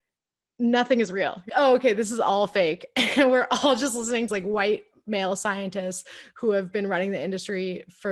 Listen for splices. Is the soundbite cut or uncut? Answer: cut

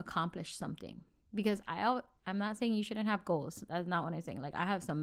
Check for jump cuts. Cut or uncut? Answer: uncut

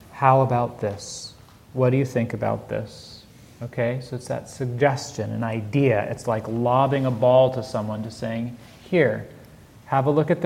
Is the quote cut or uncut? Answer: uncut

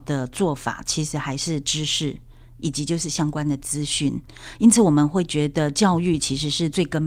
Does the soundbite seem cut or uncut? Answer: uncut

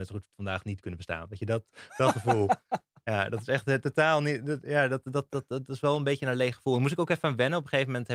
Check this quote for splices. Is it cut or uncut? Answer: uncut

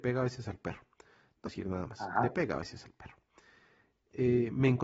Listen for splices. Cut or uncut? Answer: cut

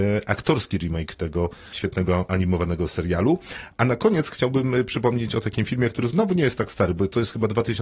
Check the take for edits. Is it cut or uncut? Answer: uncut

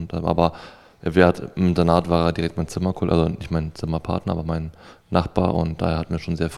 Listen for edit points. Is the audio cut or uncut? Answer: uncut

